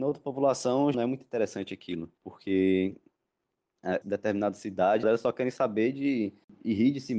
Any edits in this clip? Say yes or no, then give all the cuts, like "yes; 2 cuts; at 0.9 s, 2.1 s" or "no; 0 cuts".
yes; 4 cuts; at 0.9 s, 2.2 s, 4.0 s, 5.0 s